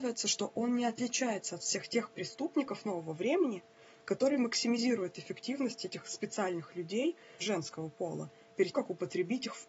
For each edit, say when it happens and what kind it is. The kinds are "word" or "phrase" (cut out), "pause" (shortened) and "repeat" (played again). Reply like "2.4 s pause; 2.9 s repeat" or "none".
7.4 s word; 8.7 s word